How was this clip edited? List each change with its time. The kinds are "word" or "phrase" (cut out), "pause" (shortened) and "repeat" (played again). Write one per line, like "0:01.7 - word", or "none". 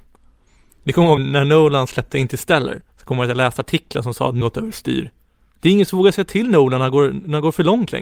0:01.2 - word
0:04.4 - phrase

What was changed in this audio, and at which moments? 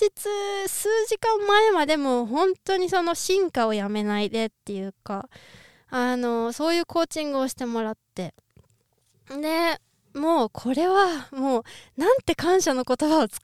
none

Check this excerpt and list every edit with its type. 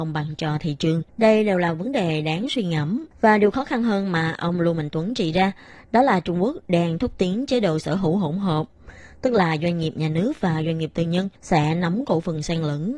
0:01.1 - pause
0:03.1 - pause
0:11.4 - pause

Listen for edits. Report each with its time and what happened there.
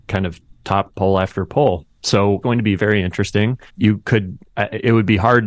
0:02.4 - word
0:02.8 - word
0:03.7 - pause

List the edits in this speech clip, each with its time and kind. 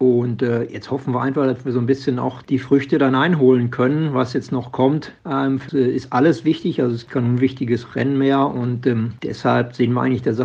0:02.4 - word
0:05.7 - word

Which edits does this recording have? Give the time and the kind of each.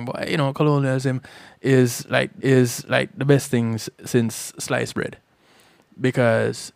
0:02.4 - repeat

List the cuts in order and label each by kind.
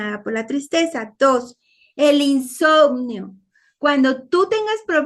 none

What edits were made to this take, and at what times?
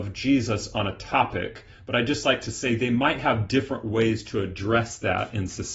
none

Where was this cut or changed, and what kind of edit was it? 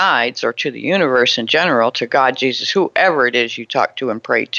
none

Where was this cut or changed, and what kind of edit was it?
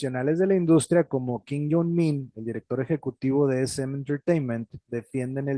none

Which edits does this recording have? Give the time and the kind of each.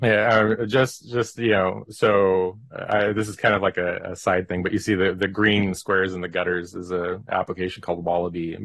none

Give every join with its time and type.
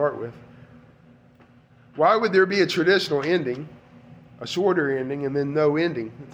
none

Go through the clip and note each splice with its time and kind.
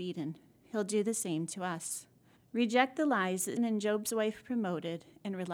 0:02.4 - pause
0:03.6 - word

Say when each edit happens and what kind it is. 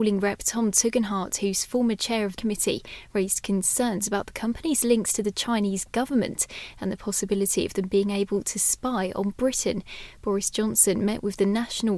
0:02.4 - phrase

